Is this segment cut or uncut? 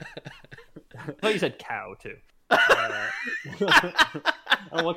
cut